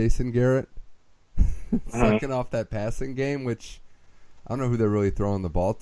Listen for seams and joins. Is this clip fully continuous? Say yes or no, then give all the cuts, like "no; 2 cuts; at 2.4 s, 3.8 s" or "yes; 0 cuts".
yes; 0 cuts